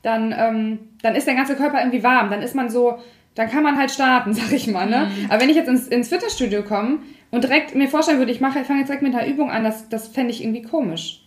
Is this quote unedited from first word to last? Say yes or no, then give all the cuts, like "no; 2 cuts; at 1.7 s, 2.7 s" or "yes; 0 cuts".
yes; 0 cuts